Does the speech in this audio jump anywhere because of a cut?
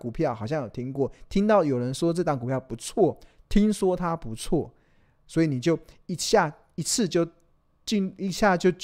no; 0 cuts

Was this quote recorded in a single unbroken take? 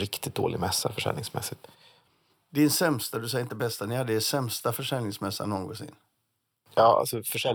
yes; 0 cuts

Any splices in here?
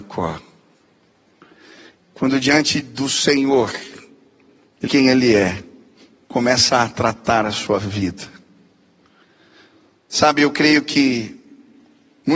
yes; 3 cuts; at 2.0 s, 4.9 s, 6.2 s

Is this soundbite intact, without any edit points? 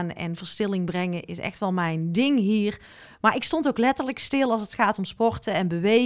yes; 0 cuts

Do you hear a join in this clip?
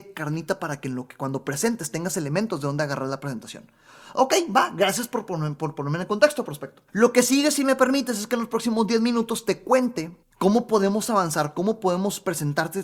yes; 2 cuts; at 6.9 s, 10.2 s

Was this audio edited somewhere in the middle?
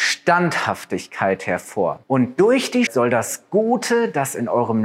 yes; 2 cuts; at 2.0 s, 2.9 s

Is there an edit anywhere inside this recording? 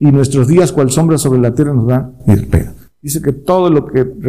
no; 0 cuts

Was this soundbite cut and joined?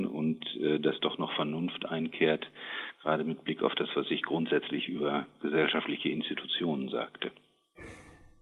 no; 0 cuts

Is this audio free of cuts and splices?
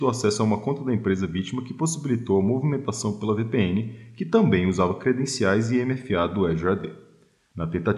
yes; 0 cuts

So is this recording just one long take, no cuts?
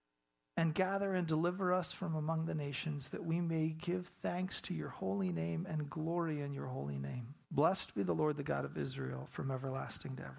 no; 1 cut; at 7.4 s

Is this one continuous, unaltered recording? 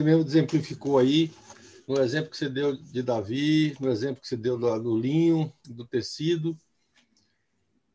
no; 2 cuts; at 1.8 s, 5.6 s

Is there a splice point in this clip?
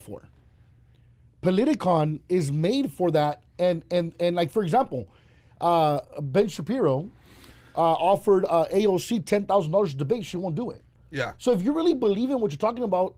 no; 0 cuts

